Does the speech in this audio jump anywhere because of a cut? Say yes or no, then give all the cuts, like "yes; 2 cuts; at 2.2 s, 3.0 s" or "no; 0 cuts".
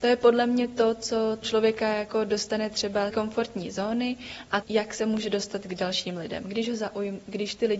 yes; 3 cuts; at 1.4 s, 3.1 s, 4.6 s